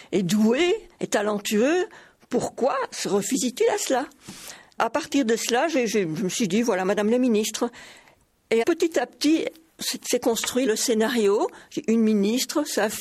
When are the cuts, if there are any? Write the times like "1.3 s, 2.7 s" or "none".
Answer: 4.8 s, 8.6 s, 10.7 s